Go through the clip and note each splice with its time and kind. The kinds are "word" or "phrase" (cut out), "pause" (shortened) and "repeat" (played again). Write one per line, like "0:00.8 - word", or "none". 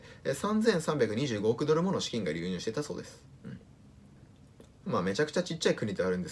0:03.3 - pause